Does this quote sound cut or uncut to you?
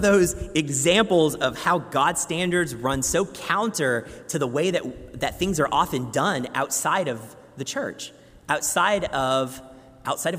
uncut